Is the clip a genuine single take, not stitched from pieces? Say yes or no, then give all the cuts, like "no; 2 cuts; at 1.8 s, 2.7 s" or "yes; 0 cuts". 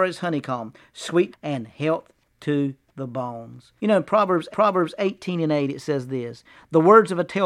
no; 3 cuts; at 1.3 s, 3.8 s, 4.5 s